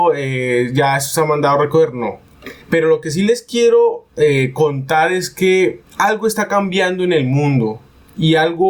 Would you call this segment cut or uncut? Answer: cut